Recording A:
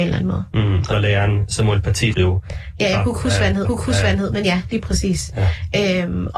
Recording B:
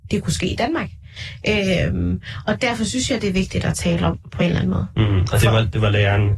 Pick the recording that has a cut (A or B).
A